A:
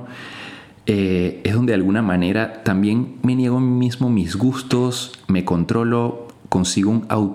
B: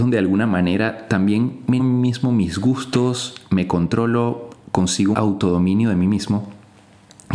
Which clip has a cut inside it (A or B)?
B